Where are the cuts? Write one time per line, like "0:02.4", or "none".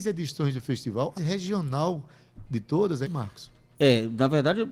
0:01.2
0:03.0